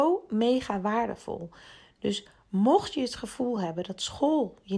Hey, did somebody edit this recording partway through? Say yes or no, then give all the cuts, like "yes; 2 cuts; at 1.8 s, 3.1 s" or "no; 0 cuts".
no; 0 cuts